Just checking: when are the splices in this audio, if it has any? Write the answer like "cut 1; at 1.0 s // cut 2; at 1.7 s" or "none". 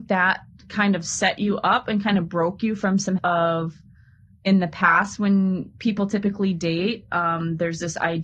cut 1; at 3.2 s